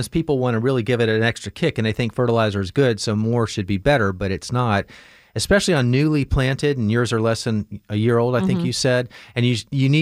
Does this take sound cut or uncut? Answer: uncut